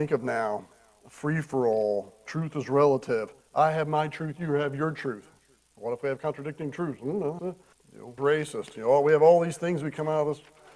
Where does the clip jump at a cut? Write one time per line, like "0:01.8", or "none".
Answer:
0:07.4
0:07.7
0:08.2

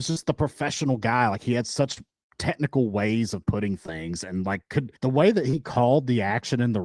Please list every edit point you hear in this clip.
0:05.0

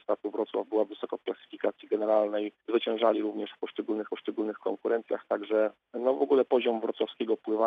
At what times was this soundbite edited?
0:02.6
0:04.1
0:05.8

